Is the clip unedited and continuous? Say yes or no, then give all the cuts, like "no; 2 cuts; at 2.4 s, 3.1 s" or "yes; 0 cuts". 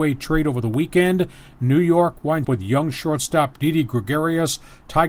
no; 1 cut; at 2.4 s